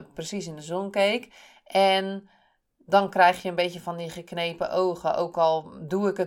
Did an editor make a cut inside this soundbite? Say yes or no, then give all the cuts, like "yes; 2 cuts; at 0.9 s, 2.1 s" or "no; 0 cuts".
no; 0 cuts